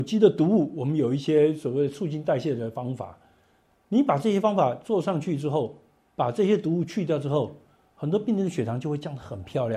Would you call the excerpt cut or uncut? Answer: uncut